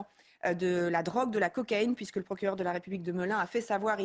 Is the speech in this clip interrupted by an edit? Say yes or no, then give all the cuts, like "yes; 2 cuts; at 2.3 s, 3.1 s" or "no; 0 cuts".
no; 0 cuts